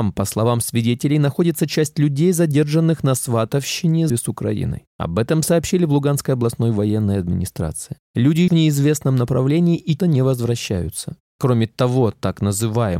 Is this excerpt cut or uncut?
cut